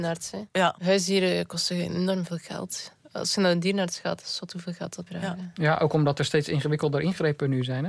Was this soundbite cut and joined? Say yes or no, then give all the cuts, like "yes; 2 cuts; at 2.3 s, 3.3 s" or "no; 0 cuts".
yes; 1 cut; at 5.1 s